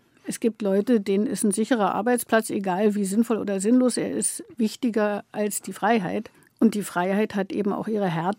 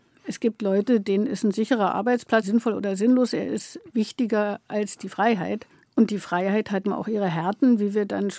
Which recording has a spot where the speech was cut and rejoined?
second; 2 cuts; at 2.4 s, 6.8 s

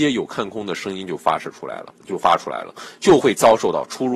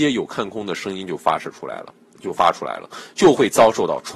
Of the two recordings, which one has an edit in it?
first; 1 cut; at 2.0 s

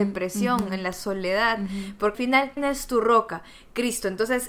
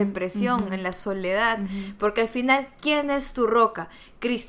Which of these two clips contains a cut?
first; 2 cuts; at 2.1 s, 2.6 s

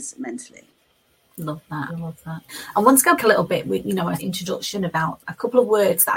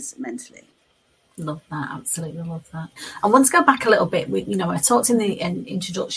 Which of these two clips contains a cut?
first; 3 cuts; at 1.9 s, 3.2 s, 4.2 s

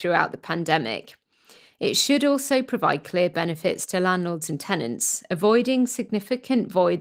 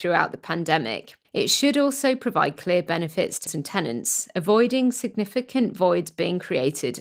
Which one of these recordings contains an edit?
second; 2 cuts; at 1.2 s, 3.5 s

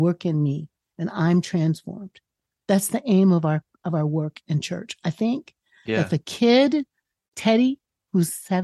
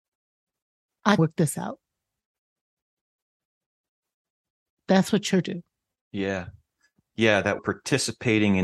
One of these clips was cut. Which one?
second; 3 cuts; at 1.2 s, 5.4 s, 7.6 s

